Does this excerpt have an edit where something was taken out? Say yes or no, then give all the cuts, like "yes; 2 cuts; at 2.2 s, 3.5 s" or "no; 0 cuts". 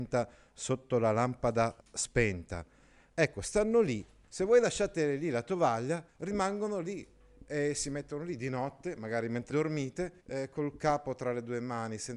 yes; 4 cuts; at 1.8 s, 6.1 s, 9.5 s, 10.2 s